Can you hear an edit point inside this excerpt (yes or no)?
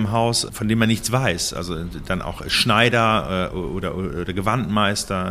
no